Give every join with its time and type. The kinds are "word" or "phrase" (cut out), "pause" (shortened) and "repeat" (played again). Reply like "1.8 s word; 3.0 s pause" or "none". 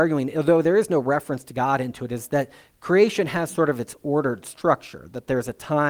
none